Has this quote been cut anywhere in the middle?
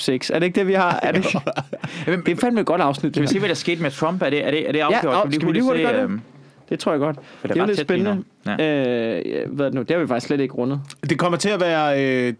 no; 0 cuts

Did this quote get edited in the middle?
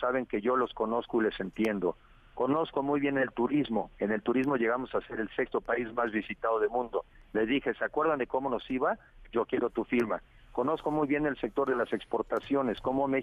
no; 0 cuts

